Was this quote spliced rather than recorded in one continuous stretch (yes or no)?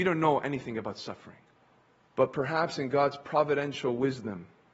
yes